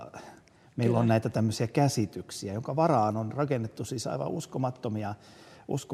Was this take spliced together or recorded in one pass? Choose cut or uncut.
uncut